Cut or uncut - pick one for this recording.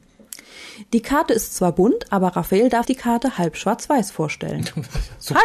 cut